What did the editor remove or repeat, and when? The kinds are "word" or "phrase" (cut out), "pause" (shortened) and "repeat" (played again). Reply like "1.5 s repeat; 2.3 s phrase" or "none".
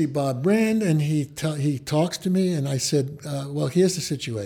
none